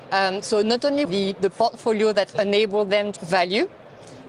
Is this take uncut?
no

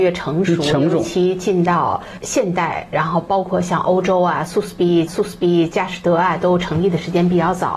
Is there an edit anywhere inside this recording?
yes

